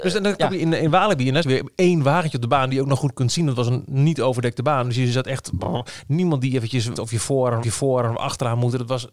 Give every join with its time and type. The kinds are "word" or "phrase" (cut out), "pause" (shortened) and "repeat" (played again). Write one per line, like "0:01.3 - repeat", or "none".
0:01.4 - word
0:07.0 - word
0:07.6 - repeat